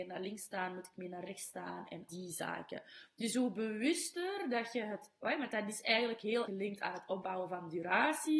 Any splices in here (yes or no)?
yes